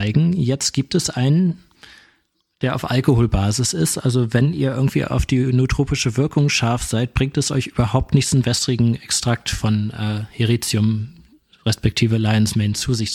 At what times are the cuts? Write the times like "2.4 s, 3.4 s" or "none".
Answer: none